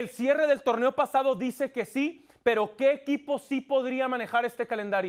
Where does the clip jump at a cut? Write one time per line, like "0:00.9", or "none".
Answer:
none